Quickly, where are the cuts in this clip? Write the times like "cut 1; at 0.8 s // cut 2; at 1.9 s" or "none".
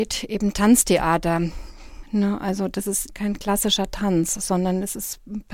none